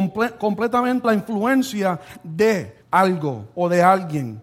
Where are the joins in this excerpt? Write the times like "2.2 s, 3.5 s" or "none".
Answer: 1.0 s, 2.8 s